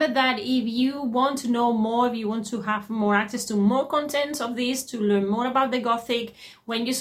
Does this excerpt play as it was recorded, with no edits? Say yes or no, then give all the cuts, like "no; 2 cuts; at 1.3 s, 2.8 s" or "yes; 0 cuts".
yes; 0 cuts